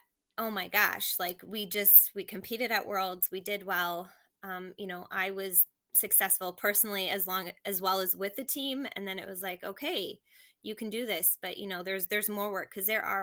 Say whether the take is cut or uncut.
uncut